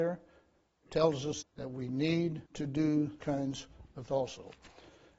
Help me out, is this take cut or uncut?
cut